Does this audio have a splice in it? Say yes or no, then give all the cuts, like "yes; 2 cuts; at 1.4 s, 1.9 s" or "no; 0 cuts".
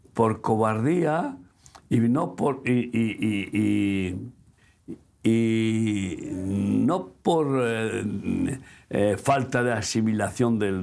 no; 0 cuts